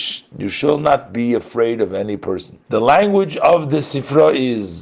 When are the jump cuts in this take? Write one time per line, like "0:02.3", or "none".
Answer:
0:02.6